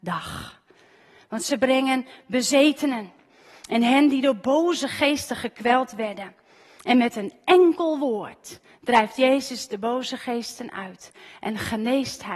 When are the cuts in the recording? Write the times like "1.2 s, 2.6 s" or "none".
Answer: none